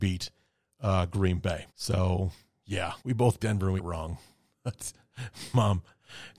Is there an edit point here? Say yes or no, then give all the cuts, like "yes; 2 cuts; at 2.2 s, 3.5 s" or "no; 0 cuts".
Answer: yes; 4 cuts; at 1.7 s, 3.0 s, 3.4 s, 3.8 s